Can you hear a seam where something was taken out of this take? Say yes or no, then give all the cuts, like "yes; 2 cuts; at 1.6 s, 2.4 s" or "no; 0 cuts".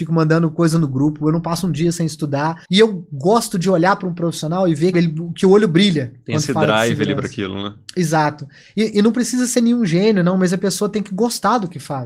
yes; 2 cuts; at 2.6 s, 4.9 s